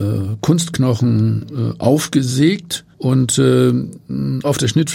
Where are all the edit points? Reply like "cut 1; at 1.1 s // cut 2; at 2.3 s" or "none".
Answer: cut 1; at 2.9 s